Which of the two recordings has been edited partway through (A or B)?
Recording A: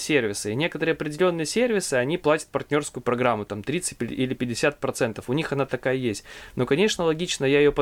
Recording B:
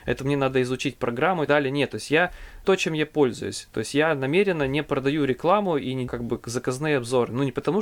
B